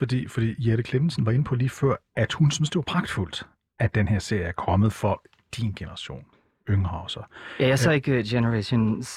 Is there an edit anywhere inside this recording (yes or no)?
no